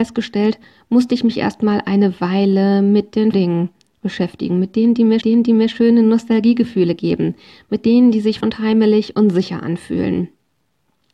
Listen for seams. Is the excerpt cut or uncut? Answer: cut